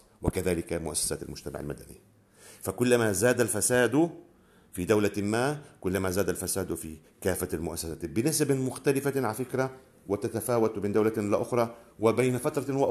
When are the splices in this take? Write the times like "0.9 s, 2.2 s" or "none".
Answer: none